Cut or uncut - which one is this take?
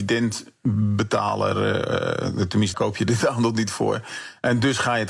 cut